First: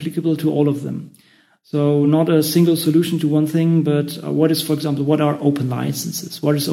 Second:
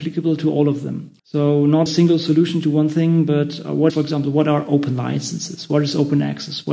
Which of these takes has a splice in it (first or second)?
second